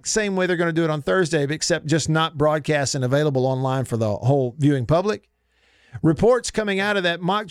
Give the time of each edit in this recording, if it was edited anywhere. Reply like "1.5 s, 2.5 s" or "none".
none

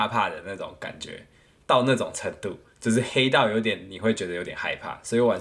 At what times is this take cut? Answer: none

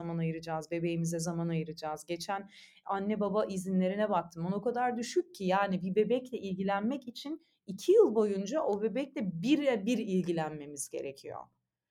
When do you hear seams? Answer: none

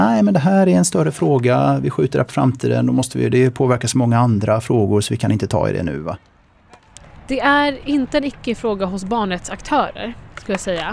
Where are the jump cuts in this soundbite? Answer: none

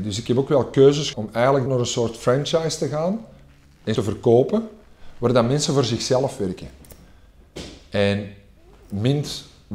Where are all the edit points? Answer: 1.1 s, 1.7 s, 3.9 s

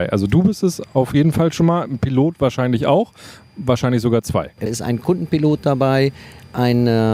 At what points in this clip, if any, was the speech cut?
4.7 s

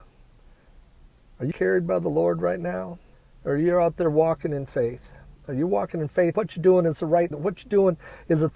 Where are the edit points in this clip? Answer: 1.5 s, 3.1 s, 6.3 s, 7.3 s

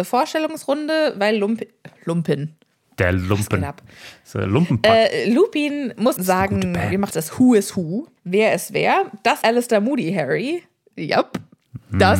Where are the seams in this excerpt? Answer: 6.2 s, 7.1 s, 8.2 s, 9.4 s

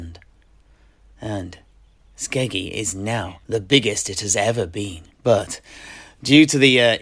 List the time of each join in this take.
3.4 s, 5.1 s

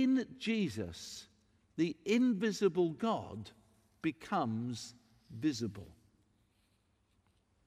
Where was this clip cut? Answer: none

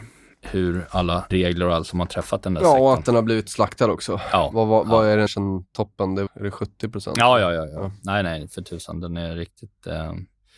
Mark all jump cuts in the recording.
1.3 s, 3.5 s, 5.3 s, 6.3 s

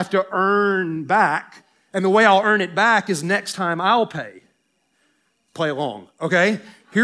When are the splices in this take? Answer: none

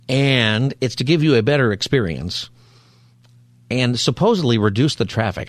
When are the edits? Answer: none

